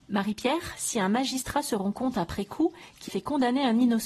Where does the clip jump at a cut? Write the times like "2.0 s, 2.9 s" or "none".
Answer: 3.1 s